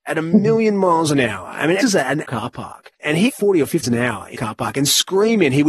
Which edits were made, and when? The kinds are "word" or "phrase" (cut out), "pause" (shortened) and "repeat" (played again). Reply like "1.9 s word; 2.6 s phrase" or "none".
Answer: 1.8 s word; 2.2 s word; 3.0 s pause; 3.3 s phrase; 3.8 s word; 4.3 s word